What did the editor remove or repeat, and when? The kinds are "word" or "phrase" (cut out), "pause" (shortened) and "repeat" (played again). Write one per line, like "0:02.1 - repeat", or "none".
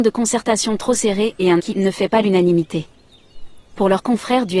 0:01.6 - word